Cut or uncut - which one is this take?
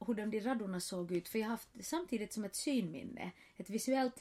uncut